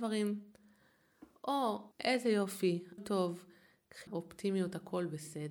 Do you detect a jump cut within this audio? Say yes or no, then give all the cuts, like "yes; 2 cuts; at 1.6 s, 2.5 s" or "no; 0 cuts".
yes; 3 cuts; at 1.9 s, 3.0 s, 4.1 s